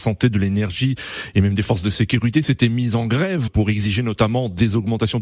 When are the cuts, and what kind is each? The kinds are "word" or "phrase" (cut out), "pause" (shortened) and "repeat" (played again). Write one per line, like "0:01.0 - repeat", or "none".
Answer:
0:03.5 - word